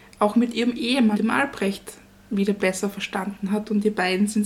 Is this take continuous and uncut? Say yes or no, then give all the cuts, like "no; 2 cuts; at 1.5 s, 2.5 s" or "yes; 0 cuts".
no; 2 cuts; at 1.1 s, 2.6 s